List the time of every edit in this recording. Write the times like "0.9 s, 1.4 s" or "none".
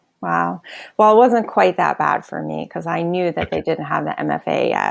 none